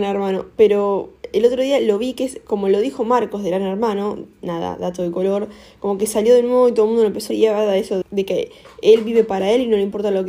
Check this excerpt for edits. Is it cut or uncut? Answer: cut